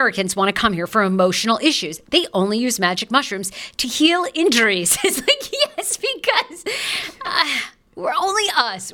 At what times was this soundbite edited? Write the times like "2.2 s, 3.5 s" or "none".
none